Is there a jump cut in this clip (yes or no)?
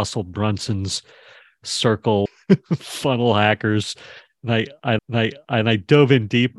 yes